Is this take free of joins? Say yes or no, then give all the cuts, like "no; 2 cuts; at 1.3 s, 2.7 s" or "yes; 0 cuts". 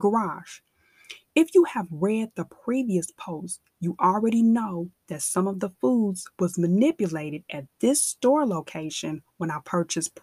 yes; 0 cuts